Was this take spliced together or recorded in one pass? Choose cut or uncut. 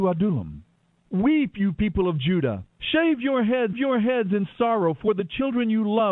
cut